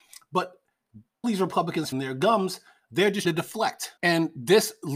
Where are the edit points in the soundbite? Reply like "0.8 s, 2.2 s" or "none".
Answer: 1.2 s, 1.9 s, 3.2 s, 4.0 s